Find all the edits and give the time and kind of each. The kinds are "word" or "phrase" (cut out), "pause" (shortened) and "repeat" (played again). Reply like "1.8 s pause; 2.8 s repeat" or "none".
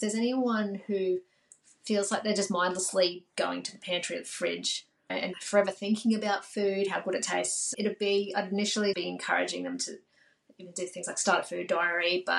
5.3 s word; 8.9 s word